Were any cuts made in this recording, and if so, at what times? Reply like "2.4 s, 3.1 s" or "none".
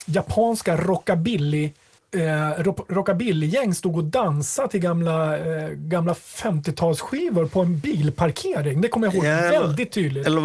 2.0 s

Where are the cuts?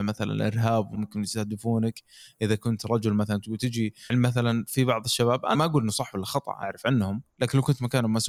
0.9 s, 4.1 s, 5.5 s, 6.6 s

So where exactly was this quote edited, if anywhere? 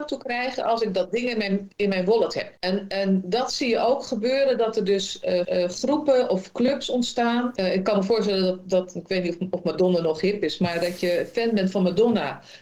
1.7 s, 5.4 s

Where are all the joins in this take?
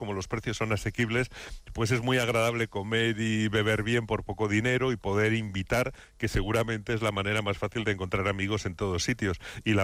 none

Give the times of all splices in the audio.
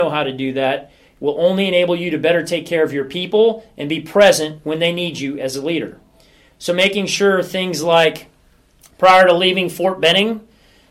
none

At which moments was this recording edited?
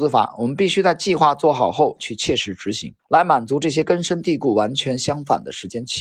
3.0 s

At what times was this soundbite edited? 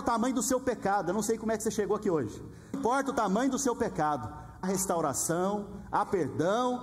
2.7 s, 4.6 s

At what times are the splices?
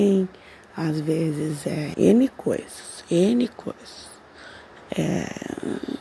1.9 s

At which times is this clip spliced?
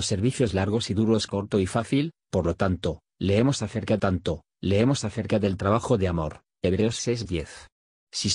4.0 s, 7.2 s

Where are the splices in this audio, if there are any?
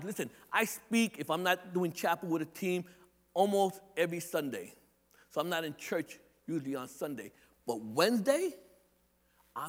none

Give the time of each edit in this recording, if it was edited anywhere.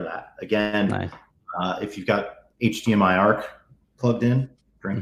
2.5 s, 3.8 s

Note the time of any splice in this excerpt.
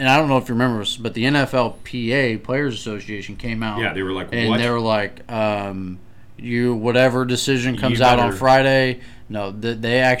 none

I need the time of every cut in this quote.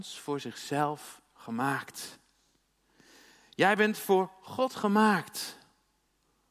none

